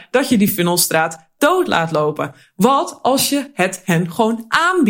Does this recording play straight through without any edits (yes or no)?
yes